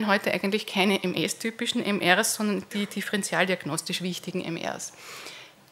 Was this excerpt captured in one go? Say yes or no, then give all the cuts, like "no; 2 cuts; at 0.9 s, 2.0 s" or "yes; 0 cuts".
yes; 0 cuts